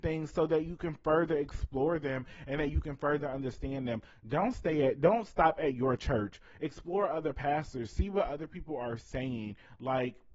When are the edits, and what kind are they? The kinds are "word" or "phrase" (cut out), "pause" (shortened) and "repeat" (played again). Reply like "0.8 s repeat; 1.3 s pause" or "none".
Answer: none